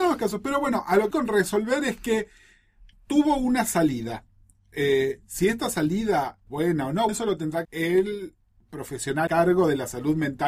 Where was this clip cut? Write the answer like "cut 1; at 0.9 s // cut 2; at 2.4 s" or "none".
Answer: cut 1; at 1.1 s // cut 2; at 6.5 s // cut 3; at 7.1 s // cut 4; at 7.6 s // cut 5; at 9.3 s